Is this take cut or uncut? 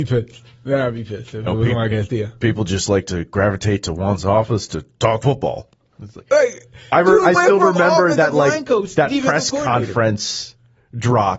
uncut